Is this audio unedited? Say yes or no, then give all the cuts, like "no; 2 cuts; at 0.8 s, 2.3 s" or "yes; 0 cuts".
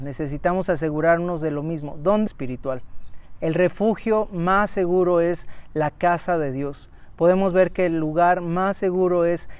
no; 1 cut; at 2.3 s